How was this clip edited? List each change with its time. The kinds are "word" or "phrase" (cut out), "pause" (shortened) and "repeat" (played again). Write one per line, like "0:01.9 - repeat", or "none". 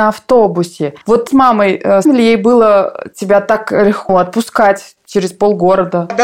0:01.3 - word
0:02.0 - word
0:04.1 - word